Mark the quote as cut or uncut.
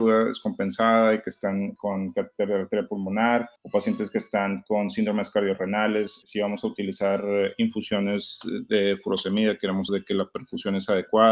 cut